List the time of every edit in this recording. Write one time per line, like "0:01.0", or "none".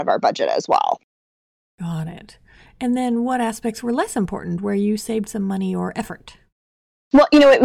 none

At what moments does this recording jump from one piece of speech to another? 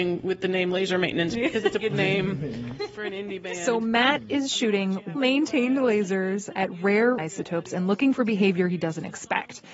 0:01.8
0:05.1
0:07.2

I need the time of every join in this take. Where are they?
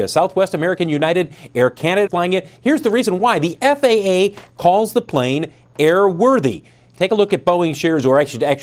0:02.1

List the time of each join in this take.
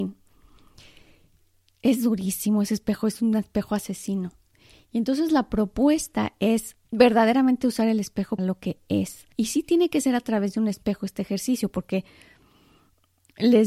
0:06.8
0:08.4
0:09.3

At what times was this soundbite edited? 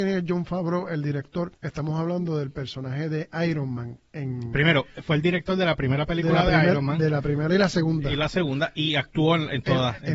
0:01.5

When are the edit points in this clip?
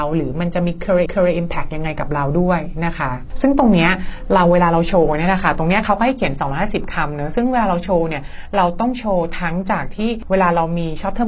0:01.1

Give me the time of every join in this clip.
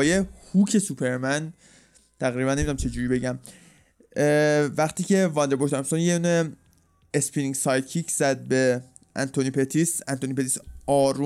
none

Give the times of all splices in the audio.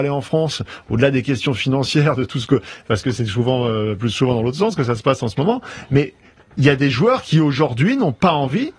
none

